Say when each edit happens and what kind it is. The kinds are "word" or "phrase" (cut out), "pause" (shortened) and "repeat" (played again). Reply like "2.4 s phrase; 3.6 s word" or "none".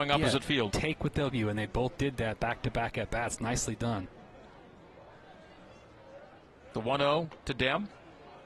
1.3 s word